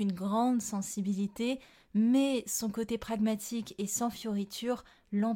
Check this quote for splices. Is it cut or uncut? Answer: uncut